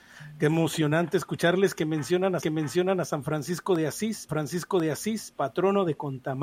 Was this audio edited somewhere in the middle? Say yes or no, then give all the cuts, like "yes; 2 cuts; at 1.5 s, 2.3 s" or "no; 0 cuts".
yes; 2 cuts; at 2.4 s, 4.3 s